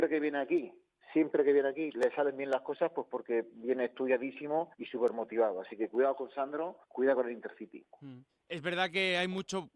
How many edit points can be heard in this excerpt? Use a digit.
3